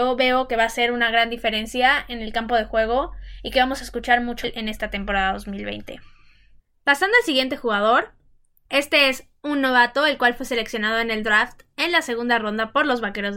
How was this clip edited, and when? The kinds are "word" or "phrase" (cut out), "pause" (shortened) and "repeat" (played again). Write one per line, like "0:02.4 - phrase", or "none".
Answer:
0:04.4 - word